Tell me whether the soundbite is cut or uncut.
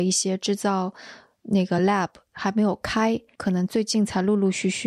uncut